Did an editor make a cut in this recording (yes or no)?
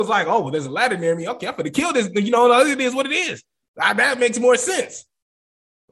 no